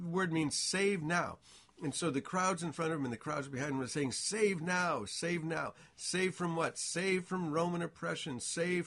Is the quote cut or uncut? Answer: uncut